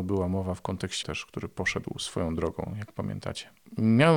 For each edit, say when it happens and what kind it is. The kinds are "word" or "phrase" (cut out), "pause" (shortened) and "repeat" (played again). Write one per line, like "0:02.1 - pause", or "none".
0:01.0 - word

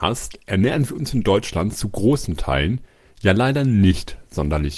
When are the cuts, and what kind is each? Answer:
none

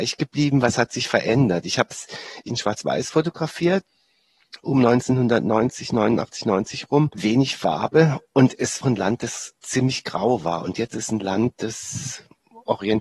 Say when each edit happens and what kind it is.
0:02.5 - phrase
0:04.6 - word
0:08.2 - pause
0:08.8 - phrase
0:09.6 - pause
0:10.9 - word

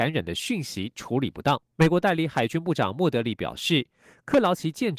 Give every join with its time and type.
0:01.7 - pause

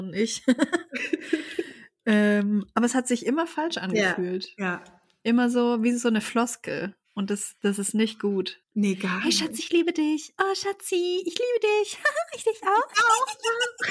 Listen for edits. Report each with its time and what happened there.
0:08.6 - pause

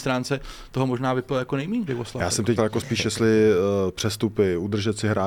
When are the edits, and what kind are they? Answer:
0:01.9 - word
0:02.6 - word

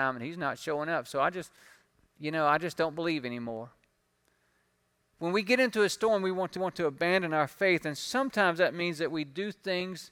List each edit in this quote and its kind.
0:06.6 - repeat

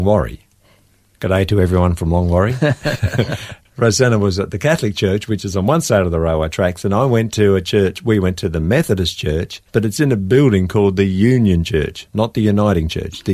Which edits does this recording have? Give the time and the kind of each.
0:03.7 - word
0:09.7 - pause

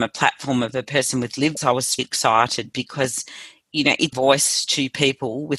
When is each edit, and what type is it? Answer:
0:01.6 - word
0:02.0 - word
0:04.1 - word

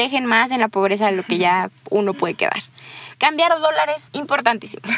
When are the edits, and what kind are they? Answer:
0:04.1 - pause

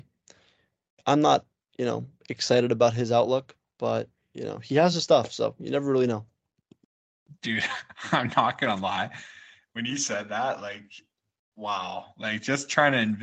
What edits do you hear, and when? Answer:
none

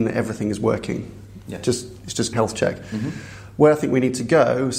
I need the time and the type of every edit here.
0:02.3 - word

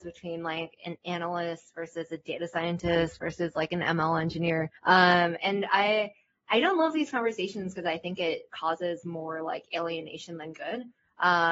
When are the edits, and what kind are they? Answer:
0:04.8 - pause

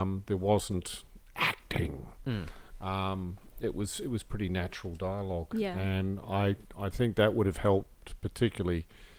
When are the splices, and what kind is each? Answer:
none

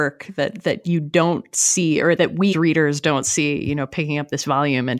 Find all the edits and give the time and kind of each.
0:02.2 - word
0:02.5 - word

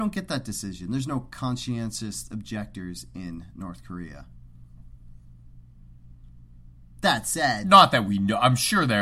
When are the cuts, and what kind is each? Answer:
none

